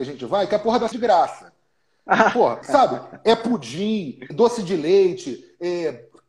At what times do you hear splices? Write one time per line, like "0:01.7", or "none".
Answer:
0:00.9
0:02.6
0:04.3